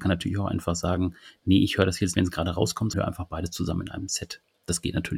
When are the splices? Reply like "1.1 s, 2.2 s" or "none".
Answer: 2.1 s, 2.9 s

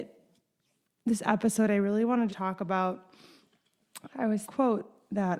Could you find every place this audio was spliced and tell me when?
2.3 s, 4.4 s

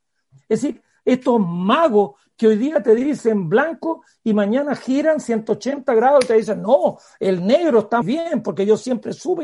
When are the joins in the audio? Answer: 8.0 s

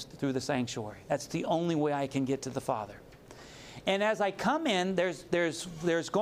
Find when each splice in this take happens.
none

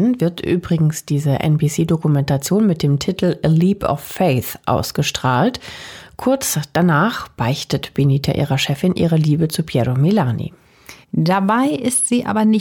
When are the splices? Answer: 11.0 s

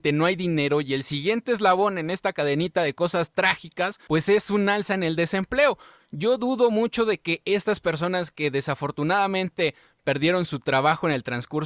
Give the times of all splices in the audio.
none

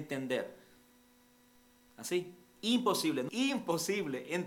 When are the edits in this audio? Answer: 3.3 s

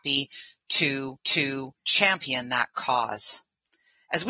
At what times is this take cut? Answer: 1.2 s

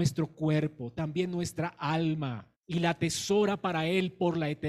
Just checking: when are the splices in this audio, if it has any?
2.6 s

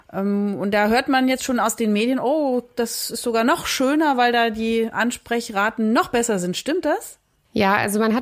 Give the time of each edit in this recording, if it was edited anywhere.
none

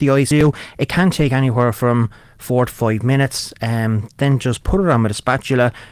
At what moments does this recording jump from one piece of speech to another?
none

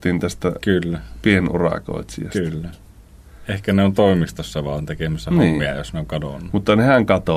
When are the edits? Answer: none

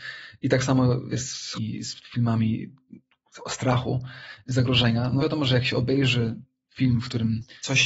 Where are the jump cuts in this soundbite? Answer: 1.1 s, 1.5 s, 5.2 s

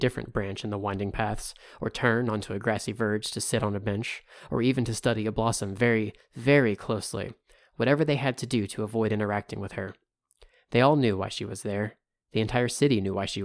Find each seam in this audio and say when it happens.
none

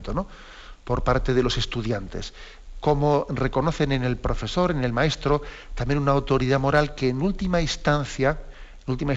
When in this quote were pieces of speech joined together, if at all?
none

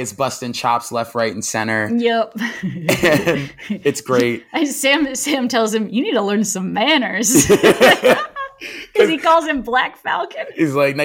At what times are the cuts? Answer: none

